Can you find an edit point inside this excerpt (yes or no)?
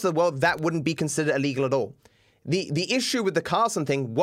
no